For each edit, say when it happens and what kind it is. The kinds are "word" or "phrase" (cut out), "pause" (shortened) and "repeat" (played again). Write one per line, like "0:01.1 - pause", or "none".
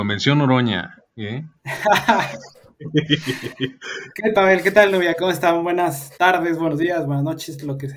0:04.3 - word
0:06.1 - pause